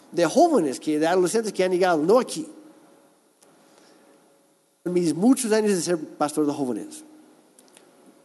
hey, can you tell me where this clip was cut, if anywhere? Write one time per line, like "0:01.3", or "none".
0:04.9